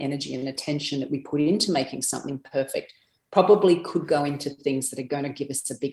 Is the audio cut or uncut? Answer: uncut